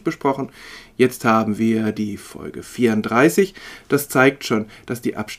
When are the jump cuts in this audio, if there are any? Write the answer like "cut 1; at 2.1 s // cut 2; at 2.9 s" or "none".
none